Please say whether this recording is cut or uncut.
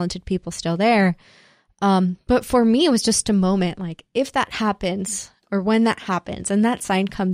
uncut